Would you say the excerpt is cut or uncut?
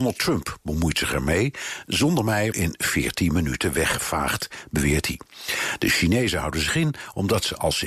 cut